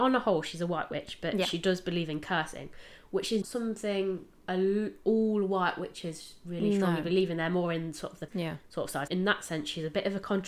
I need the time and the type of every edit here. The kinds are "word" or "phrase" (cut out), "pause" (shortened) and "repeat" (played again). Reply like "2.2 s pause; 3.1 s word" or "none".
3.4 s word; 8.3 s word; 9.1 s word